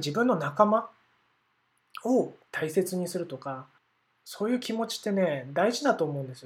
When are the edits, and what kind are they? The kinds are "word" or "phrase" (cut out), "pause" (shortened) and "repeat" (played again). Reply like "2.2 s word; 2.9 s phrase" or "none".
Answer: 2.4 s pause; 3.8 s pause